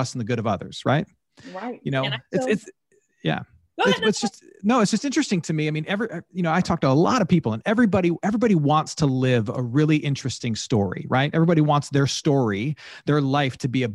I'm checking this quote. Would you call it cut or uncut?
uncut